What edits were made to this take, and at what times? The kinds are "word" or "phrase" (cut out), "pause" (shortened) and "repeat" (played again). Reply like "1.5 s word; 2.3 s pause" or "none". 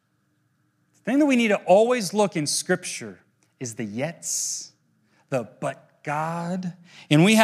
none